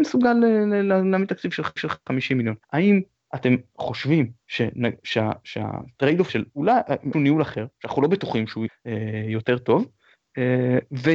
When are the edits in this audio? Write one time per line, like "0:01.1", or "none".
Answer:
0:01.8
0:02.6
0:04.4
0:06.3
0:07.1
0:08.7

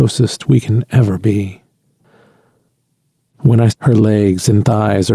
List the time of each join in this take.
0:03.7

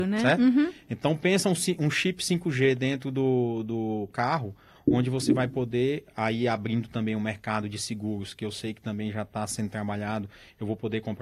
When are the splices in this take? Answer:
none

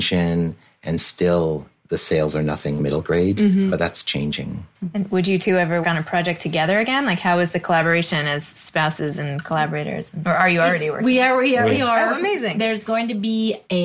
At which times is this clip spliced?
0:02.8
0:05.8
0:11.7

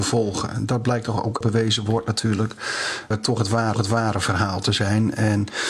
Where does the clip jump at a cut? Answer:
0:01.4
0:03.1
0:03.7

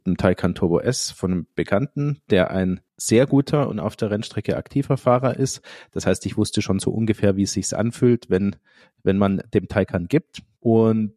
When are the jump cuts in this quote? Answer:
none

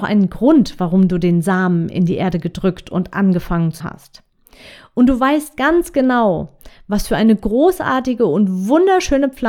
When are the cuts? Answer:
0:03.8

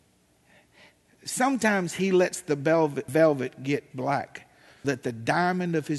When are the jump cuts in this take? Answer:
0:03.1
0:03.9
0:04.8

